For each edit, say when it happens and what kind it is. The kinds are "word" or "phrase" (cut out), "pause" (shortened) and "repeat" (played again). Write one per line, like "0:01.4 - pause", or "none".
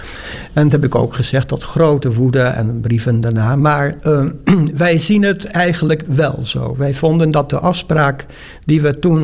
none